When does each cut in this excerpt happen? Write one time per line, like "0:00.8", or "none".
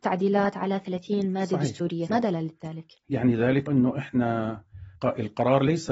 0:02.1
0:03.7
0:05.0